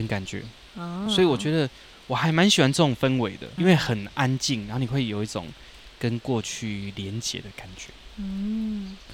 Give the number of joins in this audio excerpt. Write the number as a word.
two